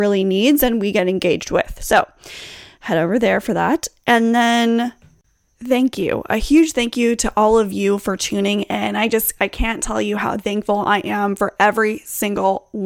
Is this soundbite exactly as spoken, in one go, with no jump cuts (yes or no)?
yes